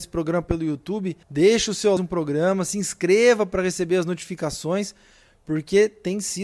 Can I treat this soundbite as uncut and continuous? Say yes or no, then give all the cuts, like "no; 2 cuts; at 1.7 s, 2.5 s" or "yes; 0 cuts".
no; 2 cuts; at 1.2 s, 2.0 s